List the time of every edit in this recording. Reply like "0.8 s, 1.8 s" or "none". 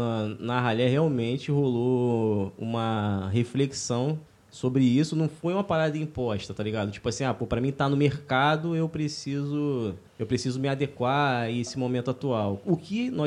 4.3 s, 10.1 s